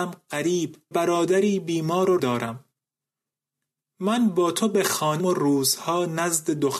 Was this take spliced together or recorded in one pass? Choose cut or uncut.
cut